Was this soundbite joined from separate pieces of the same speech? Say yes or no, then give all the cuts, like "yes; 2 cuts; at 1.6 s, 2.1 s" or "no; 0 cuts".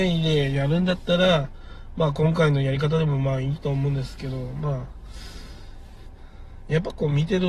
no; 0 cuts